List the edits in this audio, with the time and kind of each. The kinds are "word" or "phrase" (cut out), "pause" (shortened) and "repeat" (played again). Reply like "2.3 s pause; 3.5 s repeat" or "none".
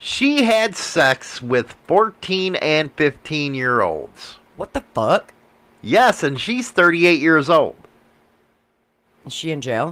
none